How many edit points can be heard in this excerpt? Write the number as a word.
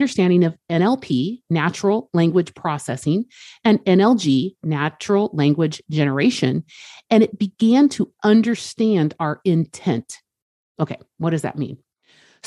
zero